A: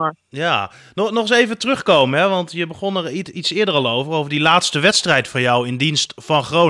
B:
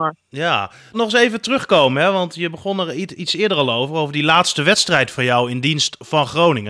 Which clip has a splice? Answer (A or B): B